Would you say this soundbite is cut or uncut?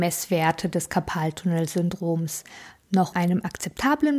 cut